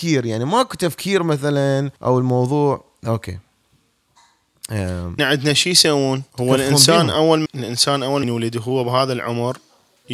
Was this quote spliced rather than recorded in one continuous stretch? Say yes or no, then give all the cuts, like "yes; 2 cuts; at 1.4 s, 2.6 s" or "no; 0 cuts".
yes; 5 cuts; at 2.0 s, 5.2 s, 6.3 s, 7.5 s, 8.2 s